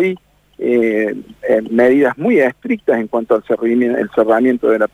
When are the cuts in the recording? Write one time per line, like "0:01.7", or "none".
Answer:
none